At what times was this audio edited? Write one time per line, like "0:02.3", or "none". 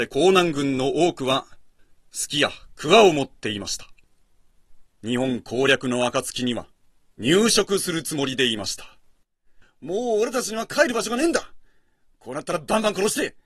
0:04.9